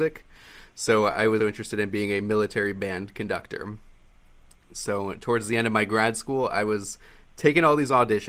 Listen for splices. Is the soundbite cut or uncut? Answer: cut